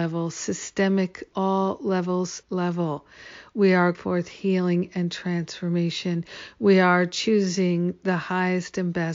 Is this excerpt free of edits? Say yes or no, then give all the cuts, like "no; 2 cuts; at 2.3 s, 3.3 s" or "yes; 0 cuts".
no; 3 cuts; at 1.3 s, 2.4 s, 3.9 s